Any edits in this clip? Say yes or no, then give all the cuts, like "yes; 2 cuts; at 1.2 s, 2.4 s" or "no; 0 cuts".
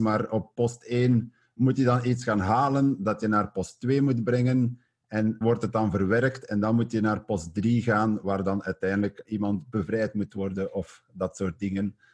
yes; 2 cuts; at 5.4 s, 9.2 s